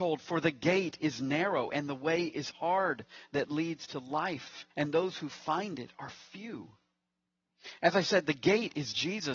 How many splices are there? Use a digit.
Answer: 1